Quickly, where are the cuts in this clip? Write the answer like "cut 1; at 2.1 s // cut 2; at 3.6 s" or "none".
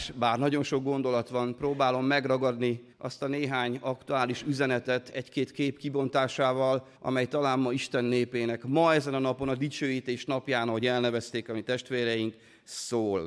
cut 1; at 2.9 s // cut 2; at 7.0 s

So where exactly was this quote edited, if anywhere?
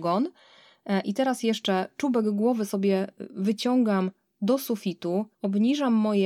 none

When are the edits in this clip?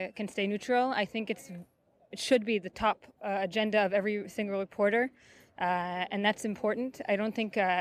none

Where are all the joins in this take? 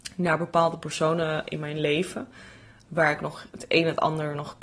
none

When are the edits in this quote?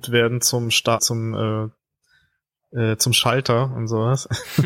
cut 1; at 1.0 s

